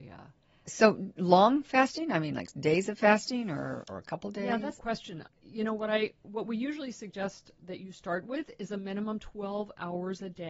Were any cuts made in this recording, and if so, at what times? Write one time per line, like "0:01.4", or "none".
0:04.8